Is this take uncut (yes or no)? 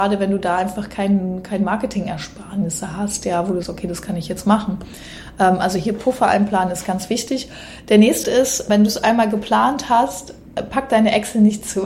no